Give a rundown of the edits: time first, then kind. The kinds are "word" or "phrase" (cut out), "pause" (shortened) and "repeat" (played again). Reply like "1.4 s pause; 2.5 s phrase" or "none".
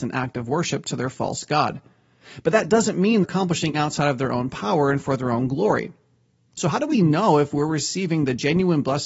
3.2 s word; 3.7 s word; 6.9 s word